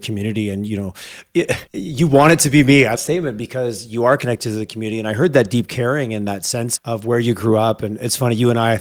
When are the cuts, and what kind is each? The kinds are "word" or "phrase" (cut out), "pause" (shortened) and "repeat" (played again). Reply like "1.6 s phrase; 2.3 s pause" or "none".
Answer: 1.7 s pause; 3.0 s phrase; 6.8 s word